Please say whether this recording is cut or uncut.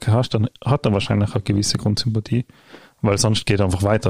uncut